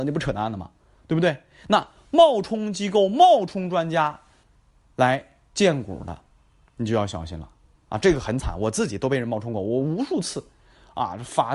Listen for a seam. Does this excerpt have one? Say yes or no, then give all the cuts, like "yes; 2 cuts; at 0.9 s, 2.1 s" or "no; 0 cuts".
no; 0 cuts